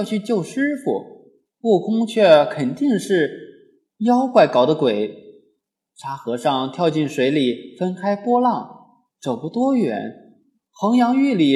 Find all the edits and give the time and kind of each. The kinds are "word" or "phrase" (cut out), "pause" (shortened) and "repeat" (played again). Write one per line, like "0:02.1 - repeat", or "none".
none